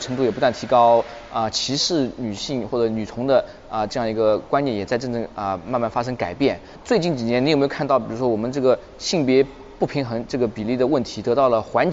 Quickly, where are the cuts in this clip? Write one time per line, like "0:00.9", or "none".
none